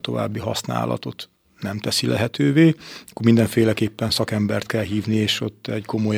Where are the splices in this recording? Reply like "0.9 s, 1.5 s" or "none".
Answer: none